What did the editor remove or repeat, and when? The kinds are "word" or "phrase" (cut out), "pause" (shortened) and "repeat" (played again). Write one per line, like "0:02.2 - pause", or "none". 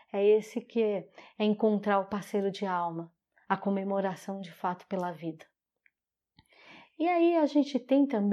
none